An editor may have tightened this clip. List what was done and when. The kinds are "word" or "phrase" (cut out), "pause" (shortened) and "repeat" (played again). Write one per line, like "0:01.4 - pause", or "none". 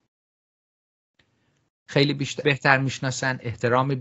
0:02.4 - word